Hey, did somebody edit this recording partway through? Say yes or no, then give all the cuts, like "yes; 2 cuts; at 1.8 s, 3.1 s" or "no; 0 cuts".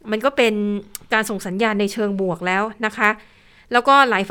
no; 0 cuts